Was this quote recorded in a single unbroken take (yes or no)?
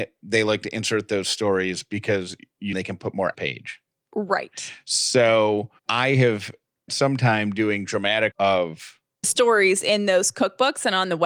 no